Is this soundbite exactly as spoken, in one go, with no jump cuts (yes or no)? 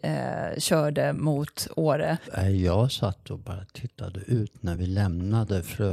yes